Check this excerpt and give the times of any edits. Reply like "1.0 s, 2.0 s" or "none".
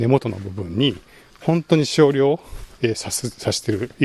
none